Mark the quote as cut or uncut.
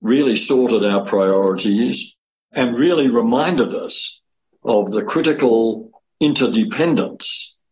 uncut